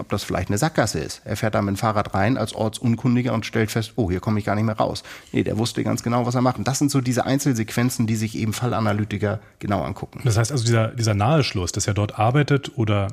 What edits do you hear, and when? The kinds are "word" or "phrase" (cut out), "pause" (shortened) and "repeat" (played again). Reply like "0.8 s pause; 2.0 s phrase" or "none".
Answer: none